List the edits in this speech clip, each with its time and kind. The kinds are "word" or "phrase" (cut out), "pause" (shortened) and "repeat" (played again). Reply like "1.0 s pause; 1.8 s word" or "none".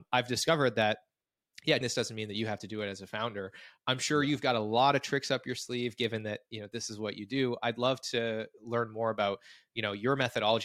1.8 s word

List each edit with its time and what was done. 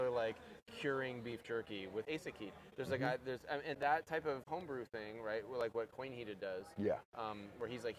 2.0 s word; 3.7 s word; 4.4 s word

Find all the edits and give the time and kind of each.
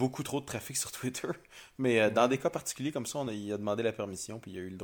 none

